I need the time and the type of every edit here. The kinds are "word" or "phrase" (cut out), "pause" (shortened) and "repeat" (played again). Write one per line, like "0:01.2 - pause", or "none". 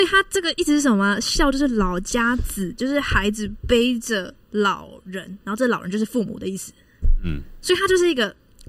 0:04.4 - pause